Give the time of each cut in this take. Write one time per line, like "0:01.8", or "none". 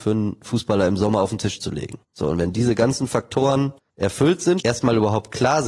0:02.0
0:03.8
0:04.6